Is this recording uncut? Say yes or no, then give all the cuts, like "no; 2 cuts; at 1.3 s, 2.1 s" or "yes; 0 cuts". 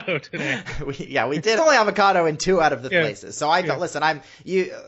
no; 2 cuts; at 1.6 s, 2.9 s